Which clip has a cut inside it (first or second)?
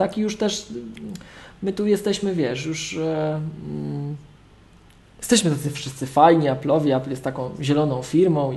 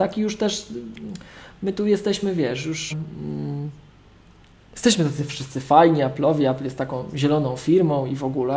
second